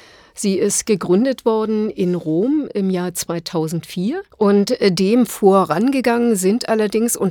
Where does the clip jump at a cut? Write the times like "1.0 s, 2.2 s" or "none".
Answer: 4.3 s